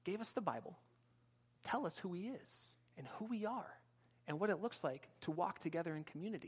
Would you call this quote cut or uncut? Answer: cut